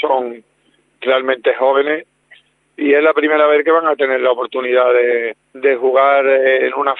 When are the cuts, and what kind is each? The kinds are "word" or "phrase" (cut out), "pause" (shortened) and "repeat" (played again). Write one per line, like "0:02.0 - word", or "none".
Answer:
0:05.4 - pause